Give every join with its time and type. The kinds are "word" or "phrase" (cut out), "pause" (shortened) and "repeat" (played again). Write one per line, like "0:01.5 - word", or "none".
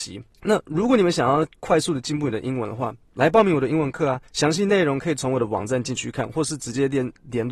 0:01.5 - pause
0:03.0 - pause
0:04.3 - pause